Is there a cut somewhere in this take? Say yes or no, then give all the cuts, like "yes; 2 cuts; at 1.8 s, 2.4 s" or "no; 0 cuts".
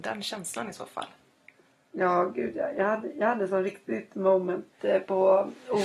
no; 0 cuts